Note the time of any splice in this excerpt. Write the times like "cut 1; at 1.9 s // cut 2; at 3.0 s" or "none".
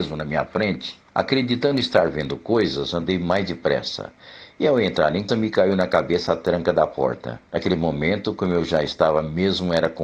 cut 1; at 1.1 s // cut 2; at 5.3 s // cut 3; at 7.5 s